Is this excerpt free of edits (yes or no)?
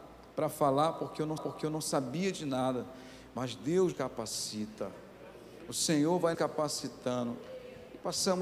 no